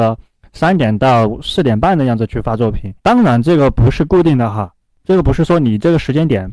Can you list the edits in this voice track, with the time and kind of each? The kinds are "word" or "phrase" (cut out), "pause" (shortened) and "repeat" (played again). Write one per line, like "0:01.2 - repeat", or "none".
0:03.0 - pause